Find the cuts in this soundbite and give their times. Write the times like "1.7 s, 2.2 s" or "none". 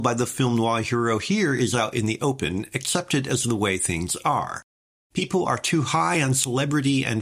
none